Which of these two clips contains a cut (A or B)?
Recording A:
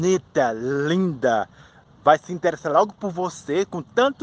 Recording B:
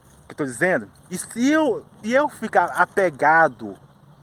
B